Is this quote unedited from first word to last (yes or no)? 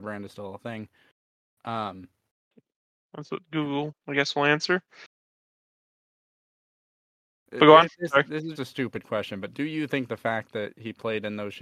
no